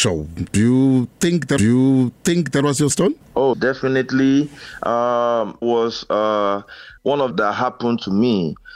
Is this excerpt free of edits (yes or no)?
no